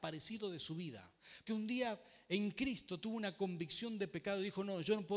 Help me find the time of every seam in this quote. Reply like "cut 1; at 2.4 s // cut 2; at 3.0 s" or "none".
cut 1; at 1.5 s